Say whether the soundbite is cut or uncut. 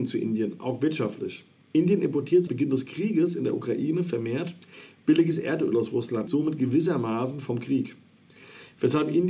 cut